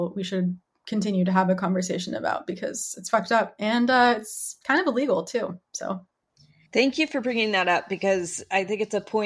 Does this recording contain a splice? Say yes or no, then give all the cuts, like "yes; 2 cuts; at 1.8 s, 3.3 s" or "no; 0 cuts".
no; 0 cuts